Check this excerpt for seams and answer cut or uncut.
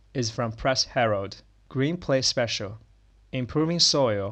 uncut